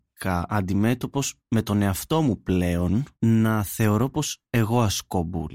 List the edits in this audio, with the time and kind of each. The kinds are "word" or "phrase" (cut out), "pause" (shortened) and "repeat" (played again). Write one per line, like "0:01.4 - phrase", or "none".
0:01.4 - pause
0:03.1 - pause
0:04.5 - pause